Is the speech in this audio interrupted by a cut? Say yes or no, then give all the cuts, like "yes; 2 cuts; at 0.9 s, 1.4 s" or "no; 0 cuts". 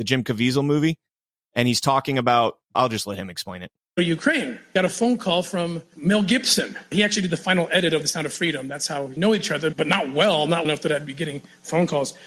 yes; 2 cuts; at 2.7 s, 10.6 s